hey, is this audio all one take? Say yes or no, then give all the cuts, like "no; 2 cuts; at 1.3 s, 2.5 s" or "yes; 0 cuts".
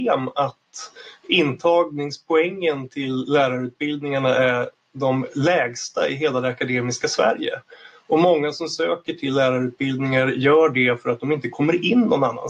yes; 0 cuts